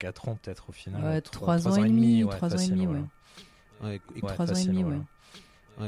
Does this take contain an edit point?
yes; 1 cut; at 4.2 s

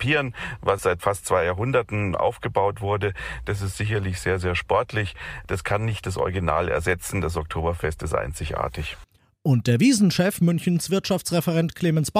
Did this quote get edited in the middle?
no; 0 cuts

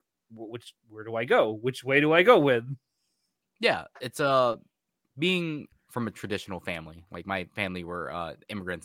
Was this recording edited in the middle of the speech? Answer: yes; 1 cut; at 5.7 s

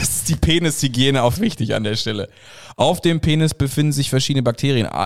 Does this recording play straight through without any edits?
no; 1 cut; at 1.3 s

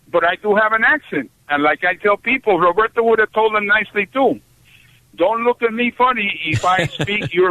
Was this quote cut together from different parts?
no; 0 cuts

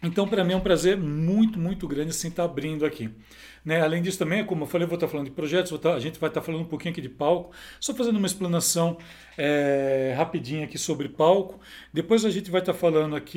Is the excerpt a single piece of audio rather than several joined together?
yes; 0 cuts

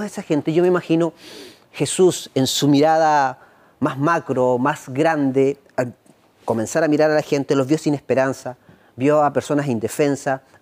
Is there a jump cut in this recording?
no; 0 cuts

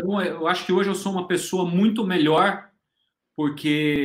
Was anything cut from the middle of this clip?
no; 0 cuts

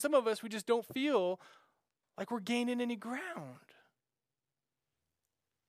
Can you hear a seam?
no; 0 cuts

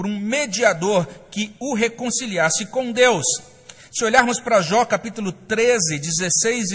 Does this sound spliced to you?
no; 0 cuts

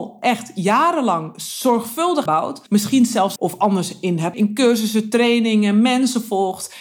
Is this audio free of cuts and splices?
no; 4 cuts; at 2.3 s, 2.7 s, 3.4 s, 4.3 s

